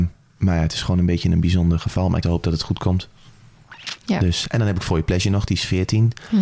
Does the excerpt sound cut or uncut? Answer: cut